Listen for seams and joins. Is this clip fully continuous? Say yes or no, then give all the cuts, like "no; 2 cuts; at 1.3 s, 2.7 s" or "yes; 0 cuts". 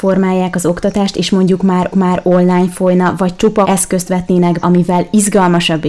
no; 3 cuts; at 1.9 s, 3.6 s, 4.6 s